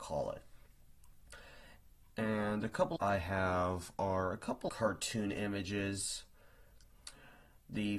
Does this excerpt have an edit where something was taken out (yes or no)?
yes